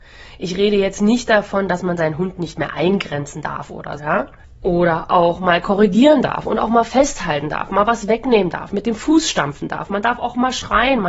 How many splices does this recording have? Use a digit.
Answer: 1